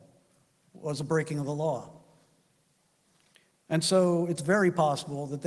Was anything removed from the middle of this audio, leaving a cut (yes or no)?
no